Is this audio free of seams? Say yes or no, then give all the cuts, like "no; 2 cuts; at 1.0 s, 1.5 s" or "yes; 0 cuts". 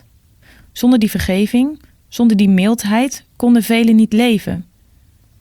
yes; 0 cuts